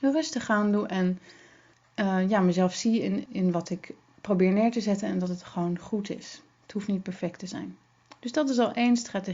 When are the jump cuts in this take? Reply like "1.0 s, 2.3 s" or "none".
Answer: none